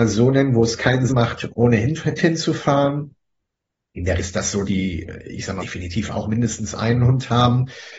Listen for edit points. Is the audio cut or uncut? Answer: cut